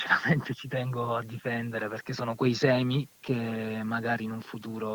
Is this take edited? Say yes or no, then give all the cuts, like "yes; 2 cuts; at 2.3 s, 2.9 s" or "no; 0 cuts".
yes; 1 cut; at 3.1 s